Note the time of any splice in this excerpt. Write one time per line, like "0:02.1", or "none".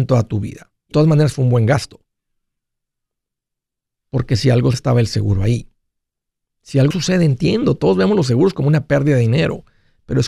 0:00.9
0:04.7
0:06.9